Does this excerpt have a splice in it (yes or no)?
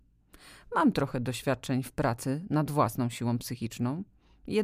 no